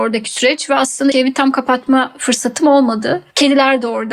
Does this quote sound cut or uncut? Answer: cut